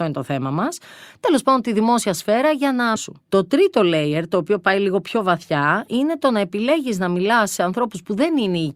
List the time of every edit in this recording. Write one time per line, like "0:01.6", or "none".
0:03.0